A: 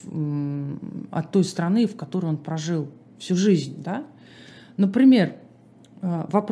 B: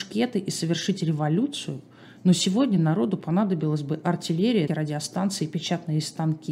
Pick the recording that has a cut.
B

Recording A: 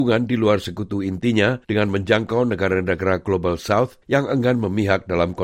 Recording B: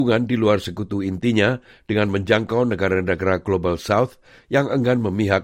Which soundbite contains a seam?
A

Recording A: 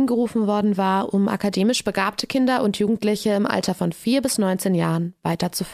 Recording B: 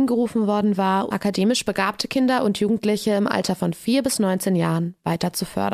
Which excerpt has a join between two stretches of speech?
B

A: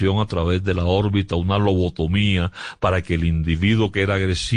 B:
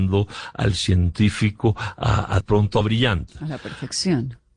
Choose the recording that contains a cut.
B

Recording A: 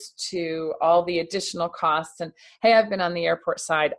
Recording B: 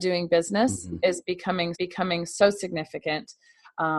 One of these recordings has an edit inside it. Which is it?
B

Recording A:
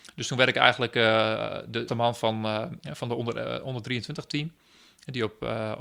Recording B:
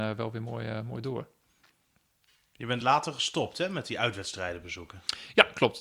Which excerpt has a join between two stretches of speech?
A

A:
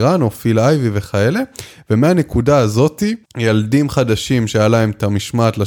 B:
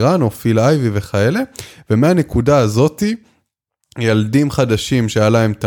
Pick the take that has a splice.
A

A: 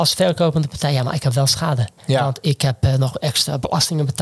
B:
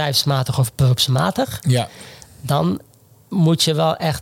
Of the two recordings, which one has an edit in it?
A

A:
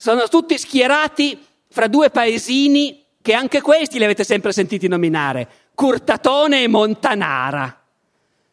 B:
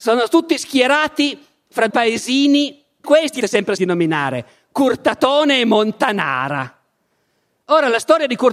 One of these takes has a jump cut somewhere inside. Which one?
B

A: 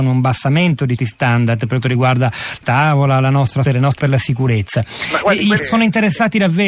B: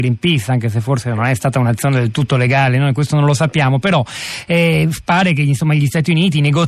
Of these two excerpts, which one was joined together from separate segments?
A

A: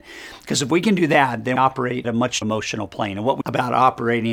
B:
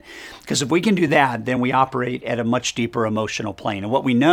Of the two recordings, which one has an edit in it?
A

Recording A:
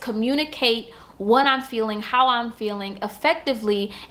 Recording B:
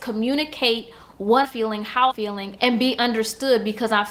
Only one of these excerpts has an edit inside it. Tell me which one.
B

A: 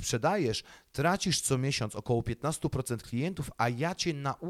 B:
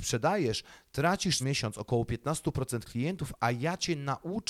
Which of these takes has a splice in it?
B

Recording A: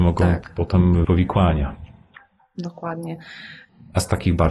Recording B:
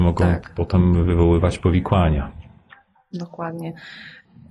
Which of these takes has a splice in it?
A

